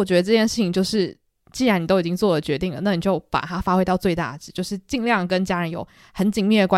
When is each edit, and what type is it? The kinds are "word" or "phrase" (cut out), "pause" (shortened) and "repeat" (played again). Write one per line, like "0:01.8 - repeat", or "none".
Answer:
none